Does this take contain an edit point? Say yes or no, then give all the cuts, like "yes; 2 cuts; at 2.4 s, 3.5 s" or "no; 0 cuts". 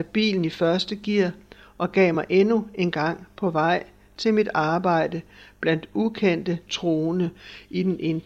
no; 0 cuts